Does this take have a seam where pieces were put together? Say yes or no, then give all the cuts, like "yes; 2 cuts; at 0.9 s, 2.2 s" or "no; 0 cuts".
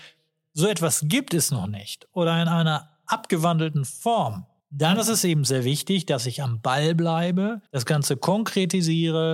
yes; 2 cuts; at 4.6 s, 7.7 s